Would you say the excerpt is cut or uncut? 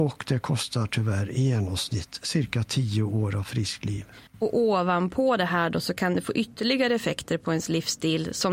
cut